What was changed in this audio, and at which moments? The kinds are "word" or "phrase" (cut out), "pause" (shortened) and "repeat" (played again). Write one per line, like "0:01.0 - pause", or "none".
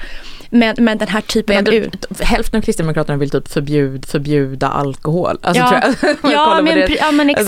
0:04.0 - repeat